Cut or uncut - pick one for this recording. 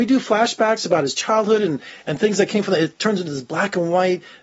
uncut